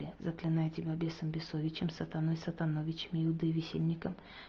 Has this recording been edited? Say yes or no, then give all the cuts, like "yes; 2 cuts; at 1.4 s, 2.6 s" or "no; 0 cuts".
no; 0 cuts